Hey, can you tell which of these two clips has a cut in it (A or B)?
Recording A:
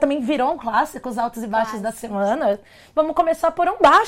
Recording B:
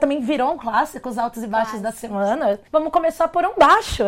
B